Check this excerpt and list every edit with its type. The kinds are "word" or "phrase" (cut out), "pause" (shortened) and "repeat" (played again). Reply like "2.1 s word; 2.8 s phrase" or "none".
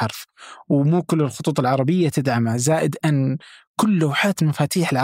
none